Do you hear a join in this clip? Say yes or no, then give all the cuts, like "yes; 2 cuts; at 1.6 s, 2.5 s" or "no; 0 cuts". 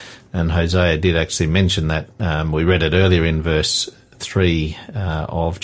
no; 0 cuts